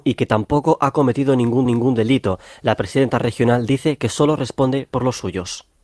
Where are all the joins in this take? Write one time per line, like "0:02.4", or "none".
0:01.7